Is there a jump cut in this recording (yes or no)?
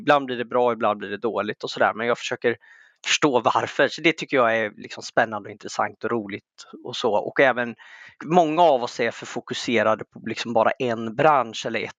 no